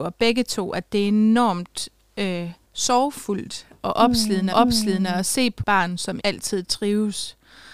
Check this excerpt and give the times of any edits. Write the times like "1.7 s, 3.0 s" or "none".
2.6 s, 4.5 s, 5.6 s, 6.2 s